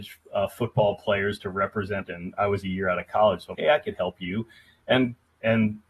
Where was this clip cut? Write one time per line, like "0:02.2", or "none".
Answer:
0:02.1
0:03.5